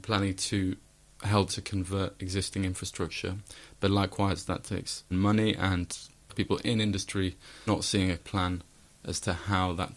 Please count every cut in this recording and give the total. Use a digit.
5